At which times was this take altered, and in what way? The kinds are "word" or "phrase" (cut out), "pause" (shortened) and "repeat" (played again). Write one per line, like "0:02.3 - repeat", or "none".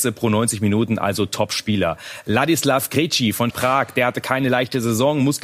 0:03.5 - word